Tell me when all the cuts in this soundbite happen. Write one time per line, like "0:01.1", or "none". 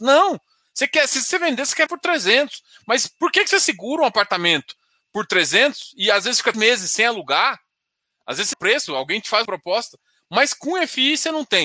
0:01.9
0:06.5
0:08.5
0:09.5